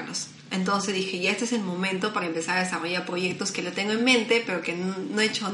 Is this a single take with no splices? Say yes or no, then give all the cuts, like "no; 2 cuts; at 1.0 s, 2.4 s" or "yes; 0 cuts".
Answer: yes; 0 cuts